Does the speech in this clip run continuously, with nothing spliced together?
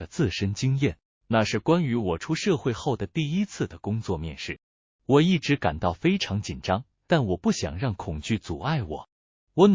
yes; 0 cuts

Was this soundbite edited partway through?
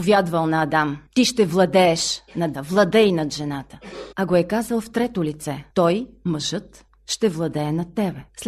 yes; 2 cuts; at 2.5 s, 4.1 s

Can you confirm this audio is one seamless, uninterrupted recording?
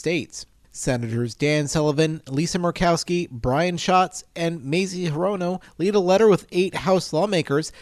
yes; 0 cuts

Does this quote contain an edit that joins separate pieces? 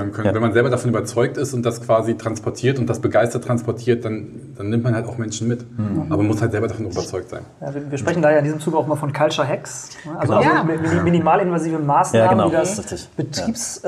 no; 0 cuts

